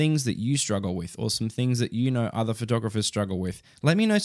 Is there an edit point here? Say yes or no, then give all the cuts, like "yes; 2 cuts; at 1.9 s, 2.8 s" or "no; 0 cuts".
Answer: no; 0 cuts